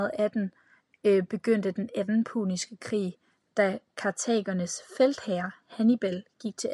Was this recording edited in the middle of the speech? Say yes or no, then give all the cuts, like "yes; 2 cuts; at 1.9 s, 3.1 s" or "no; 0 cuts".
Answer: no; 0 cuts